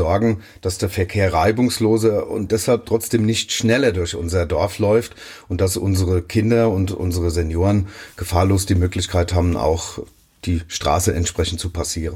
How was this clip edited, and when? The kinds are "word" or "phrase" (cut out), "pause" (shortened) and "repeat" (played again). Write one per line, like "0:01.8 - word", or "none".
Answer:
none